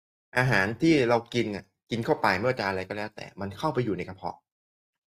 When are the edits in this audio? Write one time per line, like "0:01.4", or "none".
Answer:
none